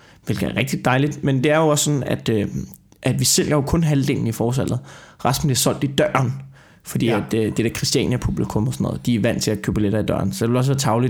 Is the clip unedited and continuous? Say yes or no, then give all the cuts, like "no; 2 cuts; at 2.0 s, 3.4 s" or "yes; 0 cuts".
yes; 0 cuts